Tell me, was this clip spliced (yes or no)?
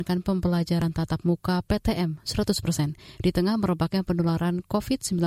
no